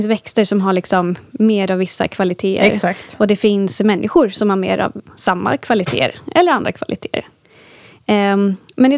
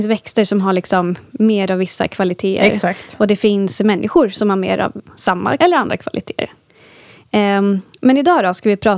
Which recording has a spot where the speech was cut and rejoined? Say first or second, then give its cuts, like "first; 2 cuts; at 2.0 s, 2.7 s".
second; 1 cut; at 5.6 s